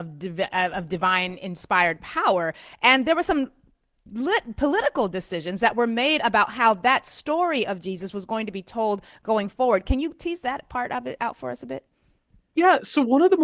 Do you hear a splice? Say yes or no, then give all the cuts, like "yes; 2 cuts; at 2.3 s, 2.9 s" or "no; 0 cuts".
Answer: no; 0 cuts